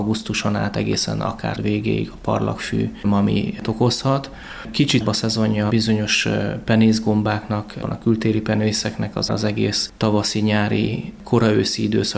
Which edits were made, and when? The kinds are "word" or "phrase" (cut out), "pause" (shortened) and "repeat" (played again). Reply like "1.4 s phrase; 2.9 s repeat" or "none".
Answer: 1.6 s word; 3.0 s word; 3.6 s word; 5.0 s word; 5.7 s word; 7.8 s word; 9.3 s word